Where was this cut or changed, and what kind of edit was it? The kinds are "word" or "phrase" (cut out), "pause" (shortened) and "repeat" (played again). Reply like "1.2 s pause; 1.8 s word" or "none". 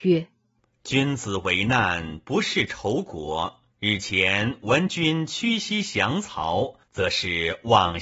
3.7 s pause; 6.8 s pause